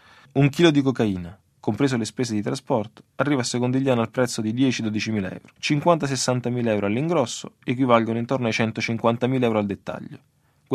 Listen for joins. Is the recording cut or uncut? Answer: cut